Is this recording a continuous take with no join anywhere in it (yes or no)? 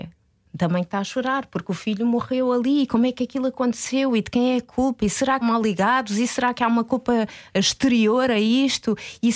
no